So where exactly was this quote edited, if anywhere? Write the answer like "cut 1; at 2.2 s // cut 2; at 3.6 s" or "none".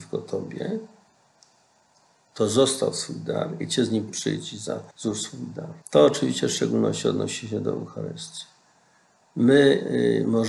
cut 1; at 4.1 s // cut 2; at 4.9 s // cut 3; at 5.8 s

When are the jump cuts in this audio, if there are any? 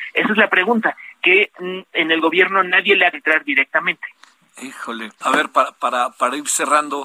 cut 1; at 3.1 s // cut 2; at 5.2 s

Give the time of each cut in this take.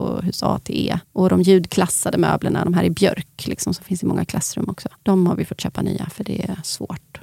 cut 1; at 1.0 s // cut 2; at 5.0 s

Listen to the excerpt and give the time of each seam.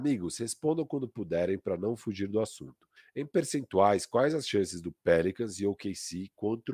cut 1; at 3.0 s

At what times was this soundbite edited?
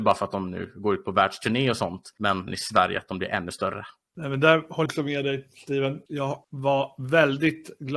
cut 1; at 2.5 s // cut 2; at 4.9 s

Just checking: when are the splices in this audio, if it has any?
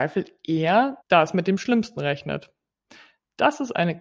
cut 1; at 1.0 s

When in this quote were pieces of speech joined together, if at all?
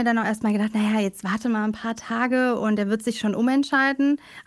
none

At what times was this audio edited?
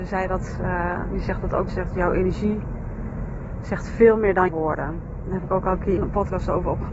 cut 1; at 1.7 s // cut 2; at 4.5 s // cut 3; at 6.0 s

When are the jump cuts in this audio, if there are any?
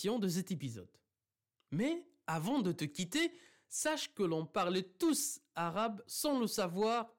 none

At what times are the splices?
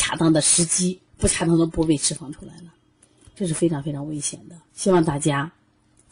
cut 1; at 1.1 s // cut 2; at 4.7 s

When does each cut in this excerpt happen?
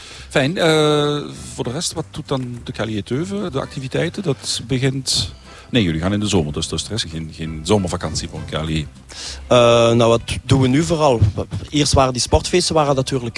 cut 1; at 3.5 s // cut 2; at 6.7 s // cut 3; at 7.0 s

